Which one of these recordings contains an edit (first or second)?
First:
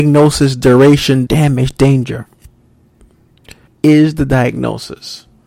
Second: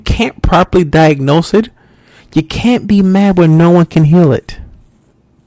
first